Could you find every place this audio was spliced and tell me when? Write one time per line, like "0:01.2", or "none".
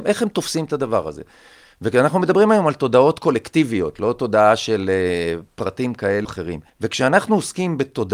0:06.2
0:06.7